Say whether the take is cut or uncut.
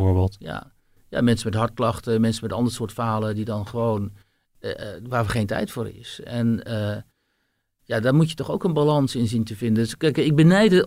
uncut